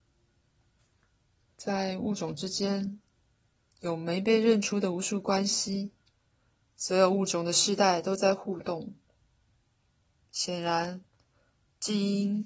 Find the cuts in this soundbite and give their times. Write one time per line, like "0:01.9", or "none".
none